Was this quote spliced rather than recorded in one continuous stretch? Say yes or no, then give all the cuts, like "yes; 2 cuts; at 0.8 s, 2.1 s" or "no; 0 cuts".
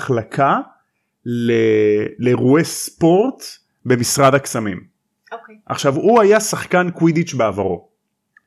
no; 0 cuts